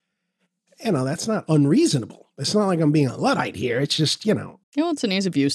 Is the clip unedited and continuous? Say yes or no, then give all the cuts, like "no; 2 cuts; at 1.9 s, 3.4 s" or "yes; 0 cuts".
no; 1 cut; at 4.6 s